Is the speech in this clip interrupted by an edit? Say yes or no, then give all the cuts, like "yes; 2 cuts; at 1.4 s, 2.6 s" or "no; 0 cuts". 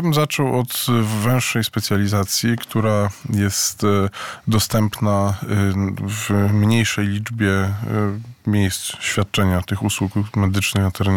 no; 0 cuts